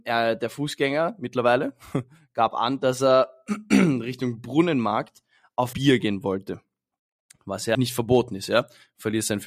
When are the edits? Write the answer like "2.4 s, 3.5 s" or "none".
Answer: 5.7 s, 7.7 s